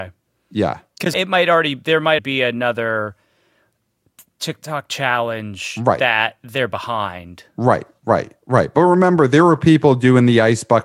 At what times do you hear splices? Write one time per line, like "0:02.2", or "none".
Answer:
0:01.1
0:02.2